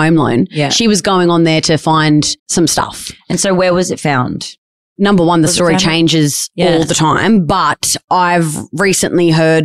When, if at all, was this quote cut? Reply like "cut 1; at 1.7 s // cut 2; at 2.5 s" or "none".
cut 1; at 2.4 s